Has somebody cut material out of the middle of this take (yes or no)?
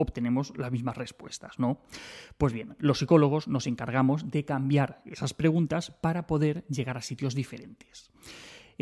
no